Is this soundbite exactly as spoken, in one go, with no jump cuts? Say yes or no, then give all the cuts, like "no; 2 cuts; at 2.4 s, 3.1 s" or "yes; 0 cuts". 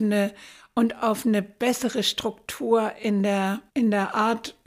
no; 1 cut; at 3.7 s